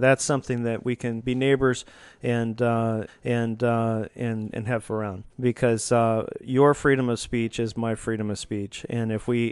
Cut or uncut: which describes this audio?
cut